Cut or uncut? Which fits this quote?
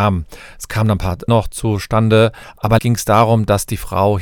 cut